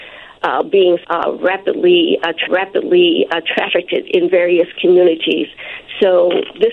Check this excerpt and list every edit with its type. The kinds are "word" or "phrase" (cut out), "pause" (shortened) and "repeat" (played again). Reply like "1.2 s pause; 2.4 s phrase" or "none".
1.0 s word; 2.5 s repeat